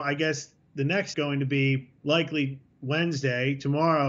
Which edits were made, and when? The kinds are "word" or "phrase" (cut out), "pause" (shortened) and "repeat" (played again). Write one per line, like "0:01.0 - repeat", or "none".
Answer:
0:01.1 - word
0:02.0 - pause

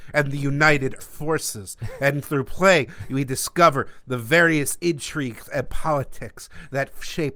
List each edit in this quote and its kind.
0:01.0 - word

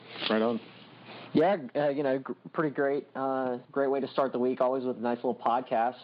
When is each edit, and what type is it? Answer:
0:03.7 - pause

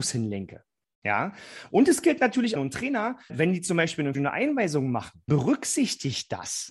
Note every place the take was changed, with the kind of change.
0:02.6 - phrase
0:03.3 - word
0:04.1 - word
0:05.3 - word

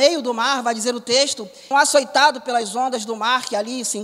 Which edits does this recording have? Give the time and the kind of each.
0:01.7 - phrase

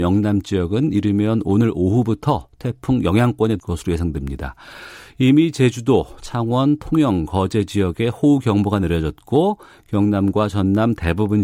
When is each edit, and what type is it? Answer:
0:03.6 - word

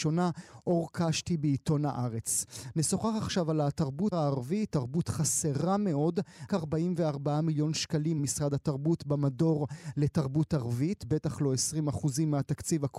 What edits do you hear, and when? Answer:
0:04.1 - word
0:06.5 - word
0:08.2 - word

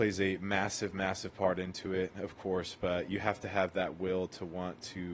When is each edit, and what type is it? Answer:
none

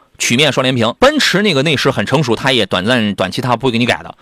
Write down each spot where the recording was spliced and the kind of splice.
0:01.0 - pause

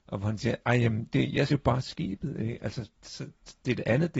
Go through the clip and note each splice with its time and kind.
0:01.5 - word

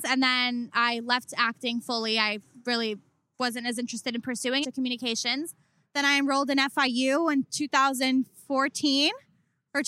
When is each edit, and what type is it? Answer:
0:04.6 - phrase

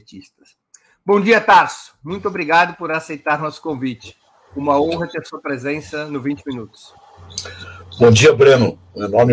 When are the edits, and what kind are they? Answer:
none

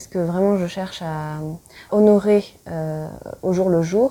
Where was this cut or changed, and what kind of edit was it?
0:01.9 - word

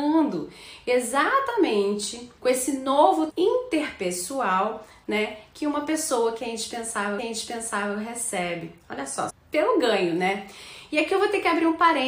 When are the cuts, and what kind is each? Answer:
0:02.4 - pause
0:03.3 - word
0:07.2 - repeat
0:09.3 - phrase

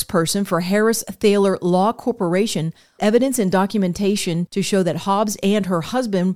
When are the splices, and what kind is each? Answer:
0:03.0 - word

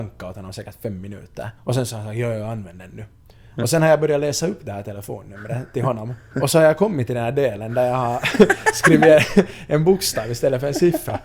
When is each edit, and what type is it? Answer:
0:01.6 - pause
0:06.3 - pause

